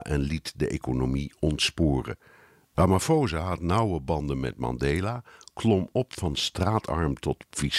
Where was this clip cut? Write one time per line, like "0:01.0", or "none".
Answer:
none